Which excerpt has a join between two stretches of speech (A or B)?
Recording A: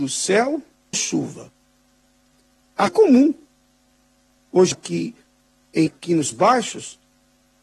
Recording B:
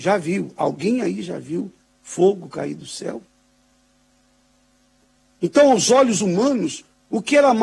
A